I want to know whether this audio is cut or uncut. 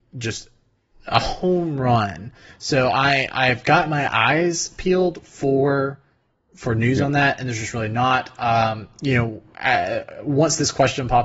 uncut